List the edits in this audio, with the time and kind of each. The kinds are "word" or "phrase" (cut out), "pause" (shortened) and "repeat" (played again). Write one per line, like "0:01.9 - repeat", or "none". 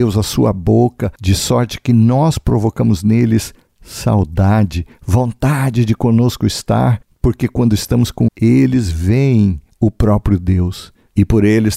0:01.2 - pause
0:08.3 - word